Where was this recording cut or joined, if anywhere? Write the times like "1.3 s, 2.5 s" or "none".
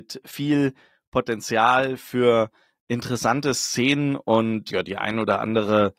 4.7 s